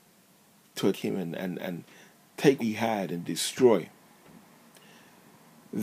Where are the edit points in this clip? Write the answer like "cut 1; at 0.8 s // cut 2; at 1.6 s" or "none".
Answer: cut 1; at 0.9 s // cut 2; at 2.6 s